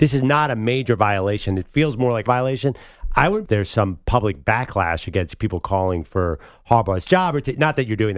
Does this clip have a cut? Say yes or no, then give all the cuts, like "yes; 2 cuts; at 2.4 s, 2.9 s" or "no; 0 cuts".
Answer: yes; 2 cuts; at 2.3 s, 3.4 s